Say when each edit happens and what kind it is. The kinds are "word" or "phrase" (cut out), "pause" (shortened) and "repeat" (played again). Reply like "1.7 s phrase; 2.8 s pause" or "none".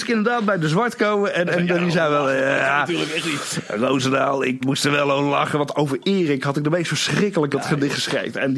1.7 s word; 4.6 s word; 5.7 s word; 7.5 s word